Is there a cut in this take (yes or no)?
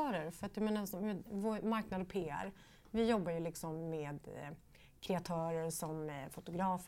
no